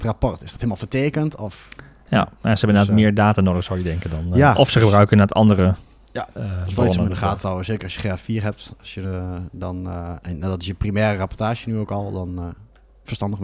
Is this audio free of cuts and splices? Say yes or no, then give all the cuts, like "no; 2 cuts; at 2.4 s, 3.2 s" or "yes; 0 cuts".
yes; 0 cuts